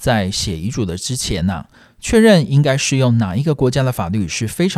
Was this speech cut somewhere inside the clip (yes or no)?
no